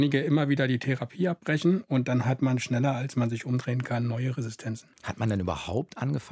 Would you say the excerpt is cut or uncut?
cut